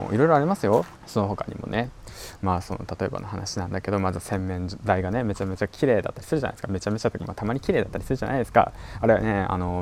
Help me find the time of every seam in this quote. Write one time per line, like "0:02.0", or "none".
0:01.0